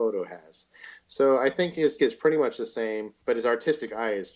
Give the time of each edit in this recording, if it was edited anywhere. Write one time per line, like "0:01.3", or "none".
0:02.0
0:03.2